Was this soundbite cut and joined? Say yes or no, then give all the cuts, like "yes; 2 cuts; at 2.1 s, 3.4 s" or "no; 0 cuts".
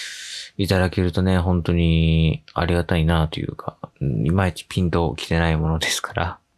yes; 1 cut; at 3.9 s